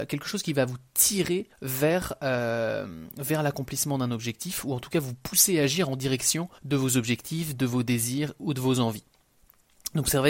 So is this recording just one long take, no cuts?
no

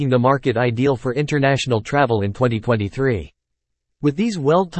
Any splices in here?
no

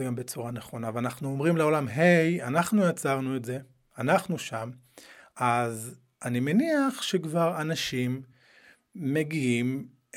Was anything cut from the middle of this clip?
no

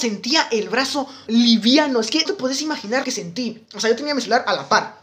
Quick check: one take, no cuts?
no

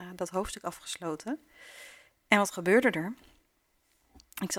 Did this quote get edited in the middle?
no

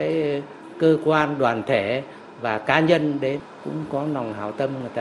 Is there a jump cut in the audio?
no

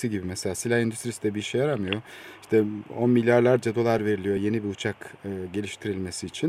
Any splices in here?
no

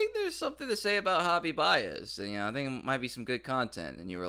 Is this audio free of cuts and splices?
yes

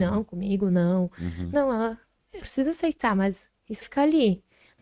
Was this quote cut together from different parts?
yes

